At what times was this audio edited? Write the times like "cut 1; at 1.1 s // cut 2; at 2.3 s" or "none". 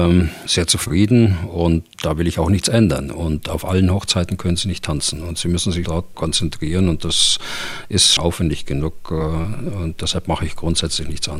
cut 1; at 1.9 s // cut 2; at 5.8 s // cut 3; at 6.1 s // cut 4; at 8.2 s